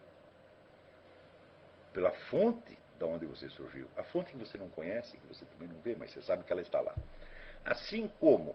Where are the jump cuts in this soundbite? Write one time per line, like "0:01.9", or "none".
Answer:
none